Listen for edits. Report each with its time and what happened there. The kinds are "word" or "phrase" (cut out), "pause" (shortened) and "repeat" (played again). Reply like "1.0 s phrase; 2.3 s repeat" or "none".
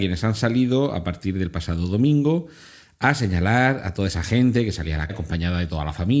5.1 s word